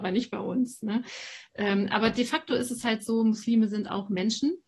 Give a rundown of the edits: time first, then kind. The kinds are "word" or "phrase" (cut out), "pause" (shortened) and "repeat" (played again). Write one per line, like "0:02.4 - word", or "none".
none